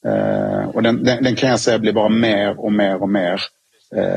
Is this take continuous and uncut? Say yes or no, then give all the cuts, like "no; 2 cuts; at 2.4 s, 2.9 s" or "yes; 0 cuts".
yes; 0 cuts